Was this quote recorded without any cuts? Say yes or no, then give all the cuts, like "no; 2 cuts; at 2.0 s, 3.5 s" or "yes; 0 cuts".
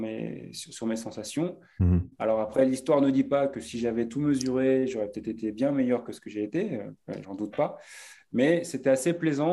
no; 1 cut; at 7.2 s